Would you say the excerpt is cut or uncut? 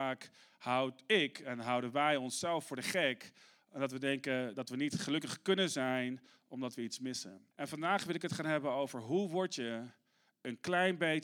cut